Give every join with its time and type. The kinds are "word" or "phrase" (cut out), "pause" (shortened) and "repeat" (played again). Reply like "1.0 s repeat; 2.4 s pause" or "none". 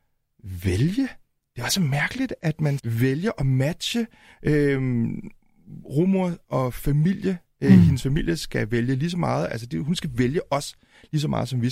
2.8 s word